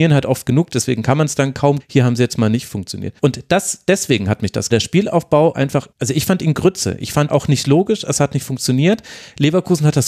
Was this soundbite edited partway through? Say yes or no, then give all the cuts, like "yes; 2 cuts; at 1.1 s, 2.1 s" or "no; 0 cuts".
yes; 6 cuts; at 1.8 s, 3.2 s, 4.7 s, 5.5 s, 5.9 s, 7.3 s